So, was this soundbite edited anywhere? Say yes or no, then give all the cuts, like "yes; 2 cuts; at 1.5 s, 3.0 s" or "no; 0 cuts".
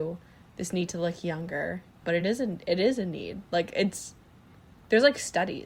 no; 0 cuts